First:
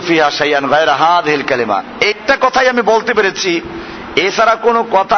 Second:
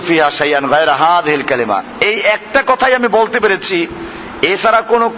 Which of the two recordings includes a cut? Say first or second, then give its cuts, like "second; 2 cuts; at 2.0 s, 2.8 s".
first; 1 cut; at 2.1 s